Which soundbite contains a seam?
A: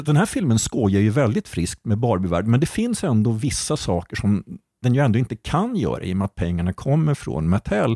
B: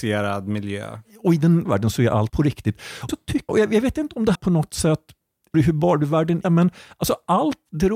B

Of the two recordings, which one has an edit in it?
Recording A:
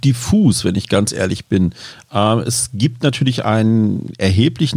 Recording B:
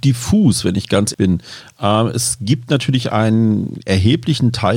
B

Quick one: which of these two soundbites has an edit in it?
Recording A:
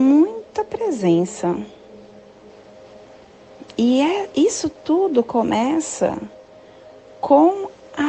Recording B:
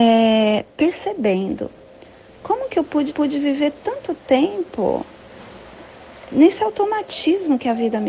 B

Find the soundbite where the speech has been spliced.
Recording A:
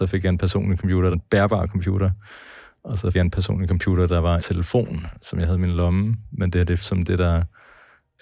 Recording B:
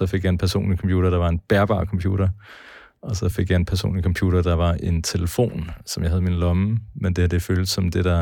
A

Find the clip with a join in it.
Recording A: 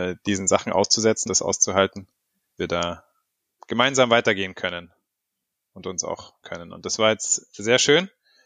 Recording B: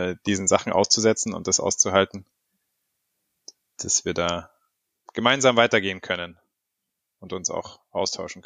A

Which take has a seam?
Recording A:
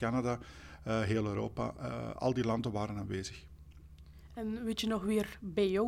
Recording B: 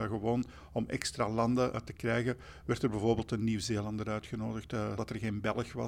B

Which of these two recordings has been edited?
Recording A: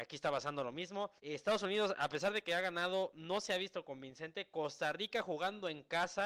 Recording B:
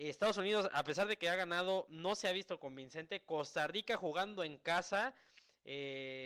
A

